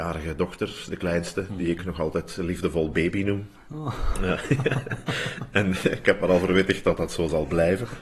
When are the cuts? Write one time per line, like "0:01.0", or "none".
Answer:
none